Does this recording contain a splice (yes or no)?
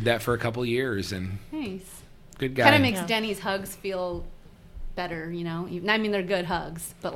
no